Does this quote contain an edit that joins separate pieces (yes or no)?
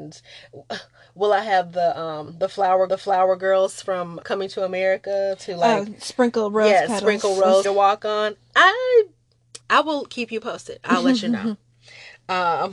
yes